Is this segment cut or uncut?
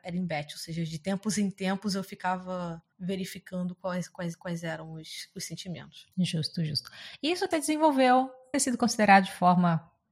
cut